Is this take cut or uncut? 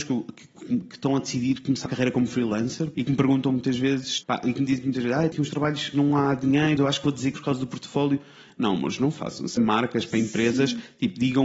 cut